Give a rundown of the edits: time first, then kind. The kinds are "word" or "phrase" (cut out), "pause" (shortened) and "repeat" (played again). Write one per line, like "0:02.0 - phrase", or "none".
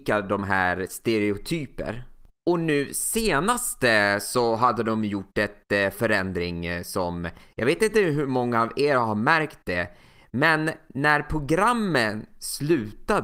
none

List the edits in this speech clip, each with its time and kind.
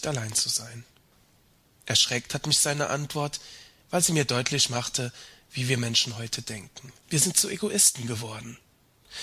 0:07.0 - pause

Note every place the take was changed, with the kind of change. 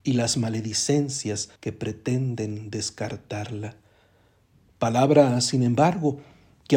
0:01.6 - pause

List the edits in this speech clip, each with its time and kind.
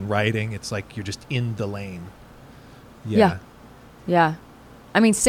none

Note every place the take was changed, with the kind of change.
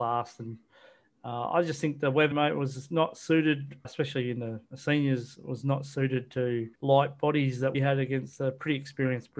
0:02.3 - word
0:03.8 - word
0:04.6 - pause
0:06.8 - pause
0:07.7 - word

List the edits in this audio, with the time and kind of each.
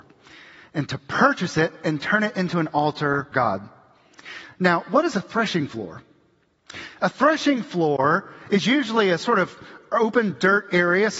0:03.3 - word

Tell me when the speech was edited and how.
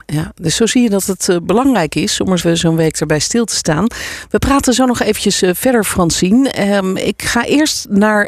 0:02.4 - word

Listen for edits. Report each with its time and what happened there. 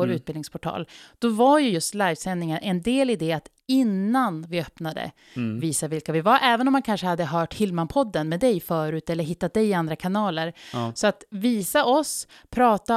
none

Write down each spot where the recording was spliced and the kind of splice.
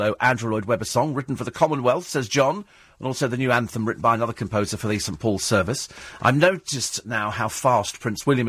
none

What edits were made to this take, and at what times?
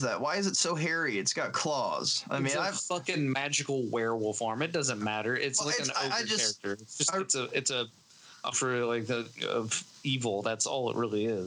0:08.5 - word

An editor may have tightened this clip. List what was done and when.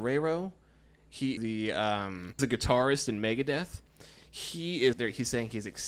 0:01.4 - word
0:02.4 - word
0:04.9 - word

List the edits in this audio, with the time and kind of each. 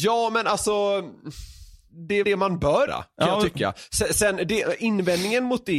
0:02.2 - word
0:02.9 - word

